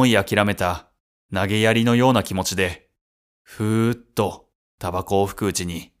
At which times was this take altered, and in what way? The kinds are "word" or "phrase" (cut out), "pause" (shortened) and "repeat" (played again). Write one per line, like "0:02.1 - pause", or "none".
none